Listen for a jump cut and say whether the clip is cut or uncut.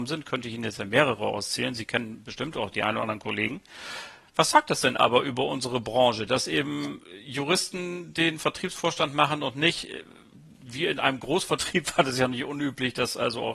uncut